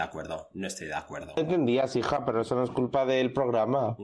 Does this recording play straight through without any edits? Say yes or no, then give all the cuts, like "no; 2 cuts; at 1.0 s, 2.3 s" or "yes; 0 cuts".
yes; 0 cuts